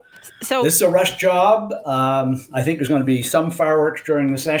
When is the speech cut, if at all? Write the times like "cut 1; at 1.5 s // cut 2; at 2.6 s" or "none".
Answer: none